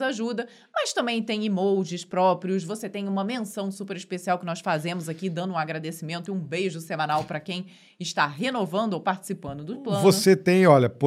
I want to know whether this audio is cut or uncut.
uncut